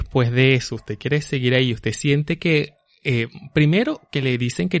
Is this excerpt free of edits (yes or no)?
yes